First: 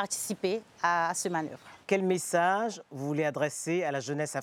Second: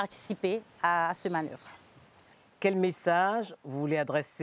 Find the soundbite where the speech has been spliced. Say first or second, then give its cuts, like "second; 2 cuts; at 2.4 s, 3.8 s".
first; 1 cut; at 1.8 s